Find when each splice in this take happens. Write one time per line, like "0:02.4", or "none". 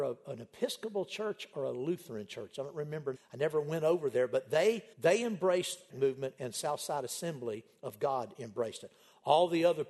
0:03.1
0:04.9
0:05.9